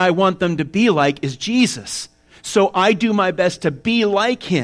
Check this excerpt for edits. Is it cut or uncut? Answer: uncut